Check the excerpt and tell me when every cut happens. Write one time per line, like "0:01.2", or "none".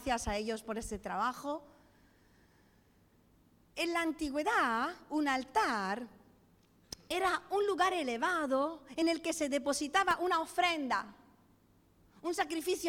none